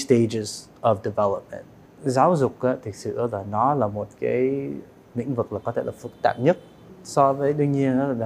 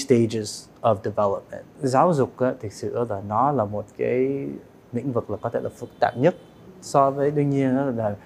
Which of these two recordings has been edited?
second; 1 cut; at 1.7 s

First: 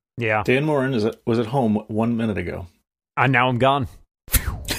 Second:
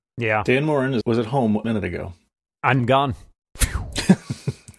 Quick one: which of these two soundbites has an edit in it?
second; 3 cuts; at 1.0 s, 1.6 s, 2.8 s

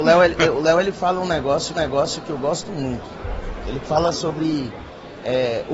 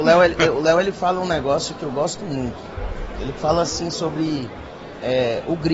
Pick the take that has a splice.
first; 2 cuts; at 1.7 s, 4.1 s

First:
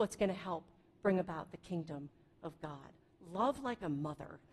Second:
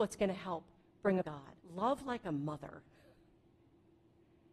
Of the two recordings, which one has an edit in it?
second; 2 cuts; at 1.2 s, 1.6 s

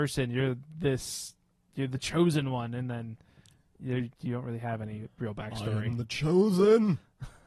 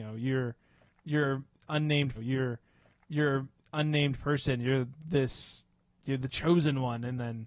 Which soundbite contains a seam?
second; 1 cut; at 2.1 s

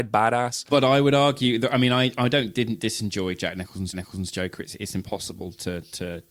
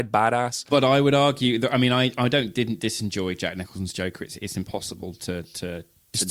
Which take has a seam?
first; 1 cut; at 3.9 s

